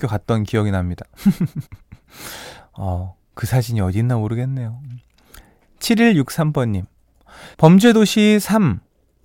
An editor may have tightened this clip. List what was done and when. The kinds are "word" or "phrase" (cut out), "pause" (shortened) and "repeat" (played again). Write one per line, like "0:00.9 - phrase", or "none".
0:01.7 - pause
0:03.3 - pause
0:07.5 - pause